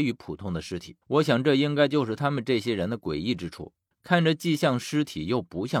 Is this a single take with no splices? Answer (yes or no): no